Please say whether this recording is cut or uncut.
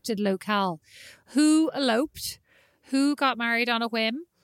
uncut